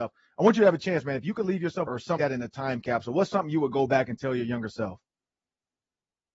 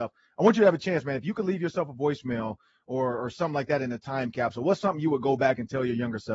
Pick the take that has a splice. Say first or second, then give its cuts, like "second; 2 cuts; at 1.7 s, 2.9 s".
first; 2 cuts; at 1.9 s, 2.2 s